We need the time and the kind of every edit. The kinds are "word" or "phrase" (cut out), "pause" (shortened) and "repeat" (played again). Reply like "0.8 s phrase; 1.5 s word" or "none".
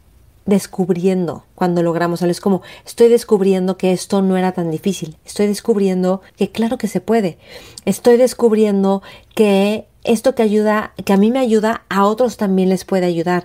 1.5 s pause; 6.3 s pause